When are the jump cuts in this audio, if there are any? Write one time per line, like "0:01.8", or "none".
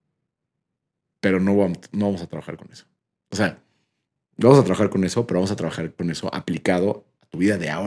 none